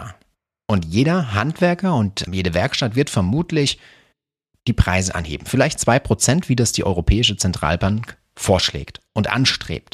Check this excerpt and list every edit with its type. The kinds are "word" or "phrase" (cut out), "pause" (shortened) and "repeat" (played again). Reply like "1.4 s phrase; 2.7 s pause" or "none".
2.3 s word